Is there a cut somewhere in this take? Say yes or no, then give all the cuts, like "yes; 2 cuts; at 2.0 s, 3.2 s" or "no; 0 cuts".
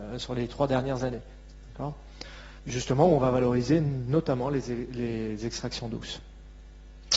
yes; 1 cut; at 2.6 s